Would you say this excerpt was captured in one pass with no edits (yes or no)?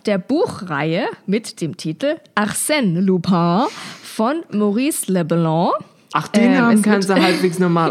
yes